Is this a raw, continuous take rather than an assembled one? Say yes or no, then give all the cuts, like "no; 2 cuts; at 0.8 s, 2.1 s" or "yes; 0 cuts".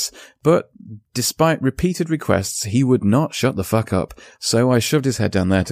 yes; 0 cuts